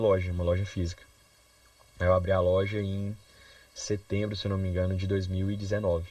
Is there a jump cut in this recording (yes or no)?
no